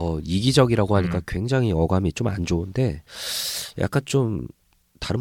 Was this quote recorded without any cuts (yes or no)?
yes